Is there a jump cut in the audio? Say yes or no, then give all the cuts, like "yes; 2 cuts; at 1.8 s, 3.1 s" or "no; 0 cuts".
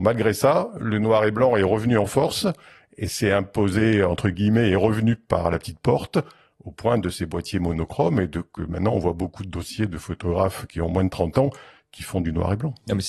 no; 0 cuts